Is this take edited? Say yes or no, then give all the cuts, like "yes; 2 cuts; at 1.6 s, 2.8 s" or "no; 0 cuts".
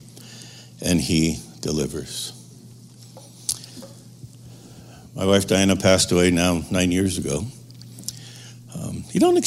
no; 0 cuts